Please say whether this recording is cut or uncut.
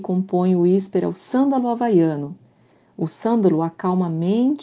uncut